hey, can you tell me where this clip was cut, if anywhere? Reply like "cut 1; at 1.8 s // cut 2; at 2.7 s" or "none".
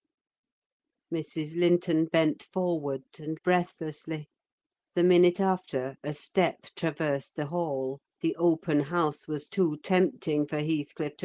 cut 1; at 3.4 s // cut 2; at 4.5 s // cut 3; at 8.1 s